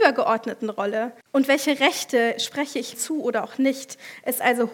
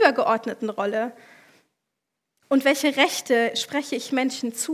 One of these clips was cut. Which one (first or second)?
first